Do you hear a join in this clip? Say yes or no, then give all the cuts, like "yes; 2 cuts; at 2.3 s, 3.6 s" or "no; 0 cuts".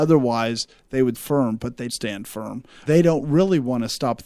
yes; 3 cuts; at 1.1 s, 1.9 s, 2.9 s